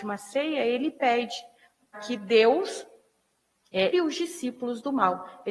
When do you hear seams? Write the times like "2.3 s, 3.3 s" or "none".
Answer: 1.9 s, 3.9 s